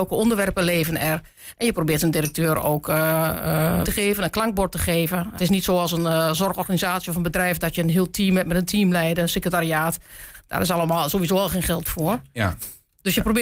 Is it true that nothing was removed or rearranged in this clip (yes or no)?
no